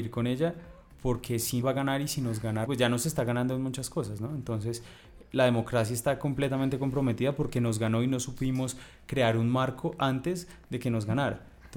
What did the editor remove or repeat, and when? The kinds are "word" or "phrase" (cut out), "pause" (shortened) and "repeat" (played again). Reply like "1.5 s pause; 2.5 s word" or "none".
1.6 s phrase; 2.7 s word